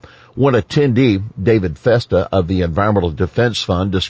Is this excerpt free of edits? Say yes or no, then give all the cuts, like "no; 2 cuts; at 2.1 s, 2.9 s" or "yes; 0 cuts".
yes; 0 cuts